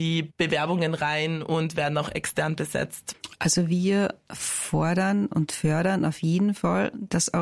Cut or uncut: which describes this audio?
uncut